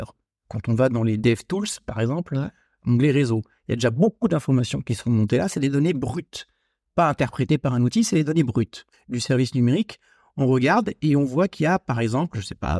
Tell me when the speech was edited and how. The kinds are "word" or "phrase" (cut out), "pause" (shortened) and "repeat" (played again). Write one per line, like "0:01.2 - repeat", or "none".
0:08.9 - pause